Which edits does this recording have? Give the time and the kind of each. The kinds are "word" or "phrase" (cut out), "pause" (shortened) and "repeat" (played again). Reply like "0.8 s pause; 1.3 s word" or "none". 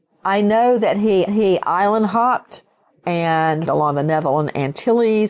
1.3 s repeat; 3.7 s phrase